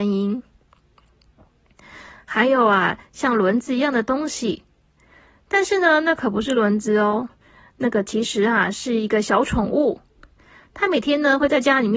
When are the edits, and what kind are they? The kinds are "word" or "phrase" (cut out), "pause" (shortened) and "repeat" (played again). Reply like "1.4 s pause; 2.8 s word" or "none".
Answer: none